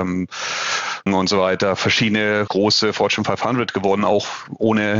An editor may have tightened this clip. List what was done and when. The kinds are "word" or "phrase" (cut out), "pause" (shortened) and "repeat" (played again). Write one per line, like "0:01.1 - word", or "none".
0:01.1 - word
0:02.5 - word